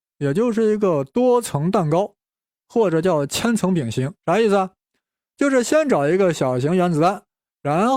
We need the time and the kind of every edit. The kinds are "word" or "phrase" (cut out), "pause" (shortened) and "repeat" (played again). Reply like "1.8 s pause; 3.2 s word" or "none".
4.2 s pause